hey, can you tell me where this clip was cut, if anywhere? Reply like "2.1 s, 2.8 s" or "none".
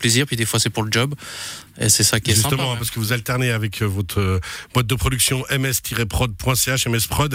none